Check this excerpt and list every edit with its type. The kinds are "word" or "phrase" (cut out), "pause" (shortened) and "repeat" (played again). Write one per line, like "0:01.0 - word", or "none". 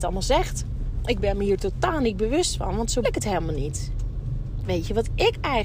0:03.0 - word